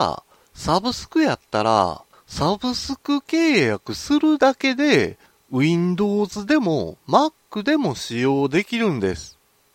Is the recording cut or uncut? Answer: uncut